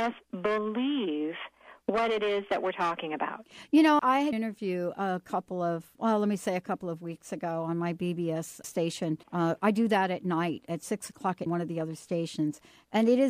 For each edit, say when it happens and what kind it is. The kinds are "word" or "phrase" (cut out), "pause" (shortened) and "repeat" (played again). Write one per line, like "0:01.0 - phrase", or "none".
0:04.0 - word
0:04.3 - phrase
0:06.0 - word
0:08.6 - word
0:09.2 - pause
0:11.5 - phrase